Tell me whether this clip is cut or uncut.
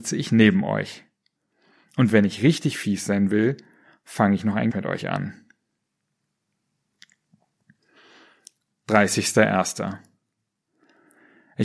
cut